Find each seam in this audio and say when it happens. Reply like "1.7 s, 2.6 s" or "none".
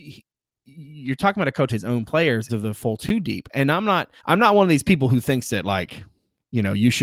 1.7 s, 2.5 s, 4.2 s